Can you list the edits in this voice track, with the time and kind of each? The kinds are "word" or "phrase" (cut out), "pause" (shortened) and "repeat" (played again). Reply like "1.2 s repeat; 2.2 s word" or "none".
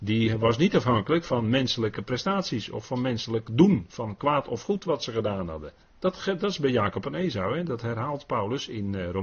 5.8 s pause